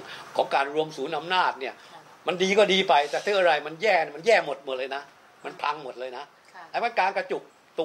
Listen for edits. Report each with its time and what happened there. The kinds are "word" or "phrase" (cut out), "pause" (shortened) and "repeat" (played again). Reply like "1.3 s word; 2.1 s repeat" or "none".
none